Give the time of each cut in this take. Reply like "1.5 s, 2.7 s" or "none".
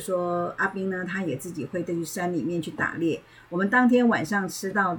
none